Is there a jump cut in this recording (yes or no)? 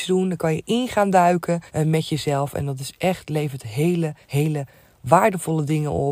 yes